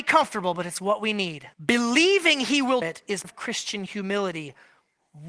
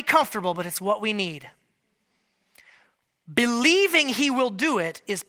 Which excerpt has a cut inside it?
first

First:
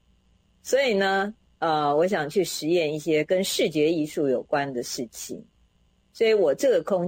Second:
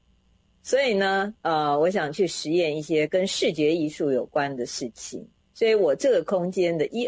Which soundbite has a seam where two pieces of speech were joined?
second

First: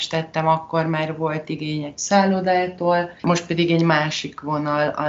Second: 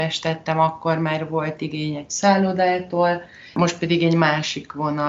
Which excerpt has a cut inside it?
first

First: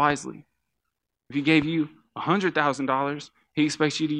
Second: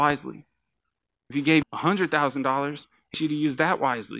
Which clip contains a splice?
second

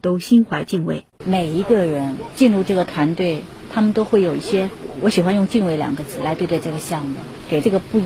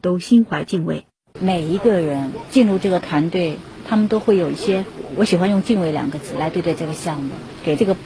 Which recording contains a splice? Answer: first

